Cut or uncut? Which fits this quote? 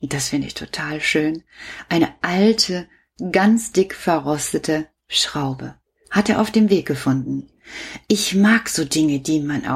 uncut